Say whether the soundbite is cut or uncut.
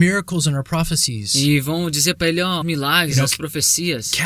cut